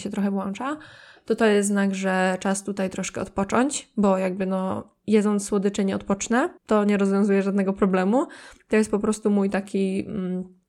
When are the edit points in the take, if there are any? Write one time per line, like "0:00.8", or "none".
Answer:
0:06.6